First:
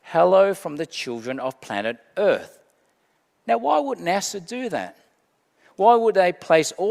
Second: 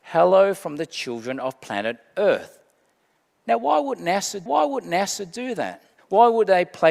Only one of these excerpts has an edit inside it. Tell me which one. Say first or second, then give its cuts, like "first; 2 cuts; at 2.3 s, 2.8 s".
second; 2 cuts; at 4.5 s, 6.0 s